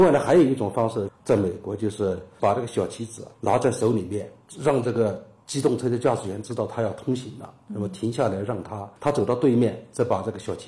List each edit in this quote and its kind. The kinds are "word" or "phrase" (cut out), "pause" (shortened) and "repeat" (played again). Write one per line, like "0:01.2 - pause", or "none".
0:03.3 - pause
0:09.0 - pause

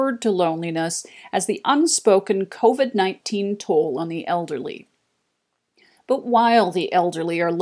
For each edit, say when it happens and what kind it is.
none

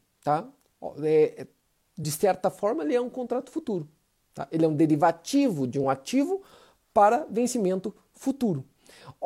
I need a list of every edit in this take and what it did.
none

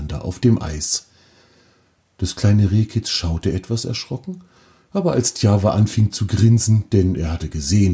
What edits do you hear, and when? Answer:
none

